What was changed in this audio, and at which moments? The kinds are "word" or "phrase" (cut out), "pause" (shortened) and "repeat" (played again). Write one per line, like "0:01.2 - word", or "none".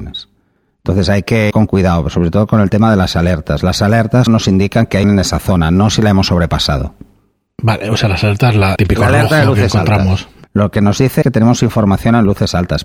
0:01.5 - word
0:04.3 - word
0:05.0 - word
0:08.8 - word
0:10.4 - word
0:11.2 - word